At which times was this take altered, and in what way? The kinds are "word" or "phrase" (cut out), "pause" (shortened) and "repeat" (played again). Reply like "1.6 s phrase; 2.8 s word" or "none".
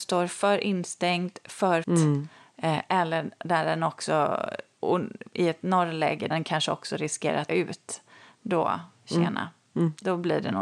1.8 s word; 6.3 s word; 7.5 s word